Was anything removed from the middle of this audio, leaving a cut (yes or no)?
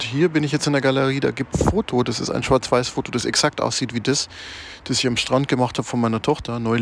yes